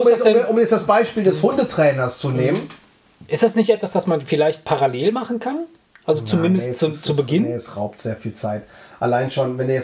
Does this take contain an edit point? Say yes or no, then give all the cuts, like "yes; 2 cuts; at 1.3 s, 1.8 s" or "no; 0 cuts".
no; 0 cuts